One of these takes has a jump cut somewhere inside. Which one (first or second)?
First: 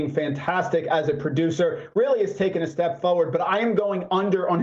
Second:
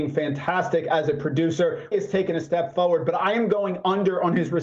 second